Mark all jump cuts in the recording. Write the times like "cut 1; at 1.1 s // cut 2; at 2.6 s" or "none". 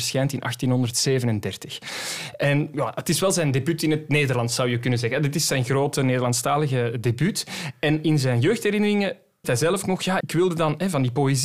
cut 1; at 9.4 s // cut 2; at 10.2 s